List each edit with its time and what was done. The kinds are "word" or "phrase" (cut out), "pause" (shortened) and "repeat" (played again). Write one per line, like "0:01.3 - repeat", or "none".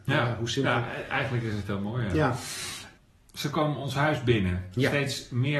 none